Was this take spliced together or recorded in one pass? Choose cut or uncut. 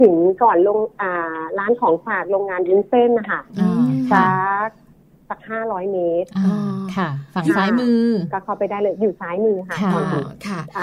uncut